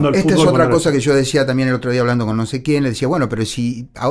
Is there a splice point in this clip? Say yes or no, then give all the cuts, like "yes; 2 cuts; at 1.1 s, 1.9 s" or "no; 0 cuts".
no; 0 cuts